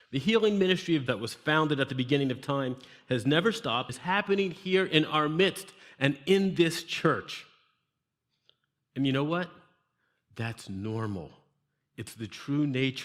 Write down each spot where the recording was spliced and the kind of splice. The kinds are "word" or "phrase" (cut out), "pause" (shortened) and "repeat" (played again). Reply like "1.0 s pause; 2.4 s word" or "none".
1.1 s word; 3.9 s word